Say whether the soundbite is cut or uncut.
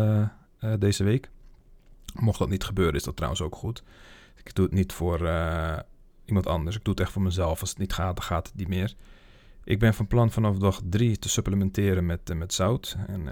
uncut